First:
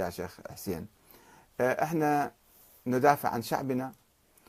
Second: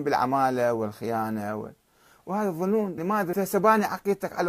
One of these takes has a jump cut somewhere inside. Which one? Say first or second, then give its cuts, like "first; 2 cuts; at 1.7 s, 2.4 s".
second; 2 cuts; at 3.0 s, 3.3 s